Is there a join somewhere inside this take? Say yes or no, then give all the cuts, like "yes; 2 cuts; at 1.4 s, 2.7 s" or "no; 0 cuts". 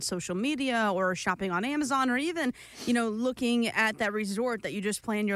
no; 0 cuts